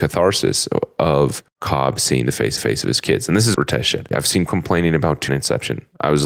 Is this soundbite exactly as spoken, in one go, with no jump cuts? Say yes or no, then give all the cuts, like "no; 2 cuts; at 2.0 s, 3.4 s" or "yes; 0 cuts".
no; 6 cuts; at 1.5 s, 2.6 s, 3.5 s, 4.1 s, 4.5 s, 5.3 s